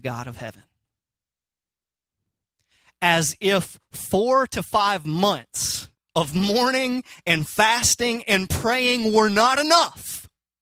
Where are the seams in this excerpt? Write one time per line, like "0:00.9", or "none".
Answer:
0:05.9